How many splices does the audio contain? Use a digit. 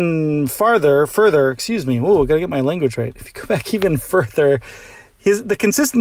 0